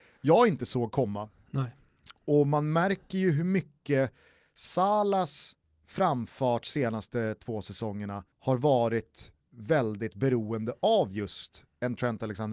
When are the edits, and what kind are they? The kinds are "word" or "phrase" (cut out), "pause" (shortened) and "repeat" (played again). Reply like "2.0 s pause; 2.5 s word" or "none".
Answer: 5.6 s pause; 8.3 s pause